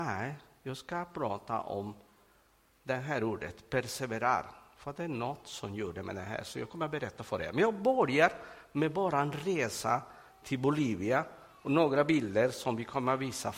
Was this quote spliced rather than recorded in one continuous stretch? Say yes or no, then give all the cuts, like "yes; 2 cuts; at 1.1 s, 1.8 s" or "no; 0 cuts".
no; 0 cuts